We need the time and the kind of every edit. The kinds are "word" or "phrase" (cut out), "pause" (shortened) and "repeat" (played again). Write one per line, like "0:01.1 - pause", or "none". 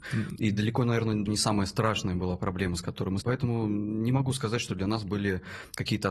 0:01.3 - word
0:03.2 - word